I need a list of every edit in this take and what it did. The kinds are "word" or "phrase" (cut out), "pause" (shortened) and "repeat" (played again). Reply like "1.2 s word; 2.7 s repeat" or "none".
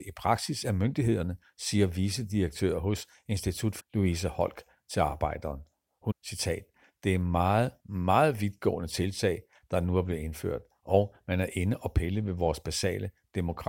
3.8 s word; 6.1 s word; 7.8 s word